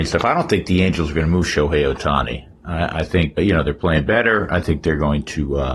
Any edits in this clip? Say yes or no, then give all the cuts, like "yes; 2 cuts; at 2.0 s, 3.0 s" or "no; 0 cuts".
yes; 1 cut; at 3.4 s